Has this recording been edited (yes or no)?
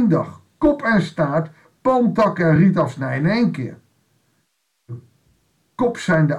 no